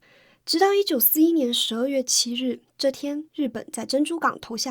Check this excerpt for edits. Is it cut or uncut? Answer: cut